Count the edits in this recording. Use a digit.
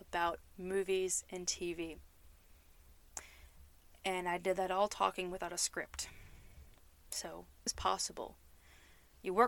1